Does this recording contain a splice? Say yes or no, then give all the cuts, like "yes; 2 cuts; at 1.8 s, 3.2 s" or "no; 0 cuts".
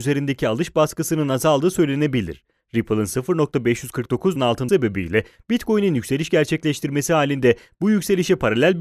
yes; 2 cuts; at 4.4 s, 4.7 s